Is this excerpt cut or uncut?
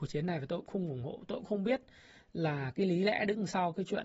uncut